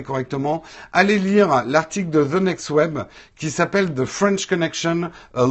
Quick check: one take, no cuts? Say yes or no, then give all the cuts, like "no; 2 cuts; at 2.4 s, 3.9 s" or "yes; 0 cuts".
yes; 0 cuts